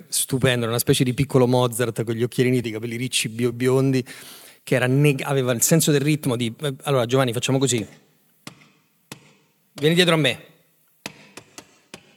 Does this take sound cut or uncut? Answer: cut